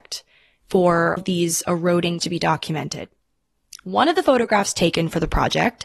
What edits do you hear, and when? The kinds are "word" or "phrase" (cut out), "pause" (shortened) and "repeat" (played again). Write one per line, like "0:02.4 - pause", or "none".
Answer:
0:01.2 - word
0:02.2 - word